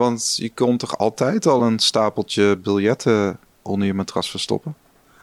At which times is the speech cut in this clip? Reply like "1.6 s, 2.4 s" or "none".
none